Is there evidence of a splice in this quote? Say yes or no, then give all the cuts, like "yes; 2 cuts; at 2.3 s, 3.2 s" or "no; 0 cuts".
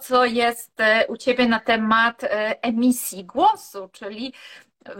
no; 0 cuts